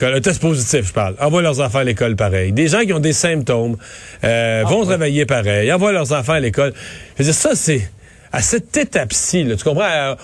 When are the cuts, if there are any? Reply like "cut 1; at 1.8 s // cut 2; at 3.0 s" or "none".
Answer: none